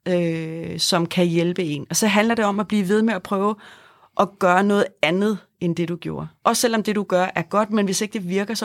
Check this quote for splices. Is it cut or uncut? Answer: uncut